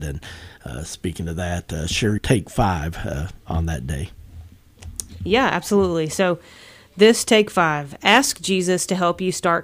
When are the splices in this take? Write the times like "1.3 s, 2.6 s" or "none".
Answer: 2.2 s